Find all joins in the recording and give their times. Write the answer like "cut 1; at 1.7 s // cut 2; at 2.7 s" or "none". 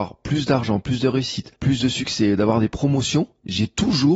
cut 1; at 1.5 s